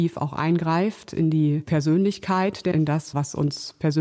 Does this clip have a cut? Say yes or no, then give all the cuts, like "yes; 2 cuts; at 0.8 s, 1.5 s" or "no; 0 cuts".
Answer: yes; 1 cut; at 2.7 s